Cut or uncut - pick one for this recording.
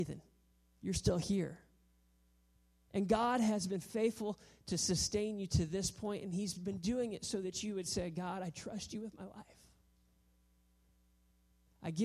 uncut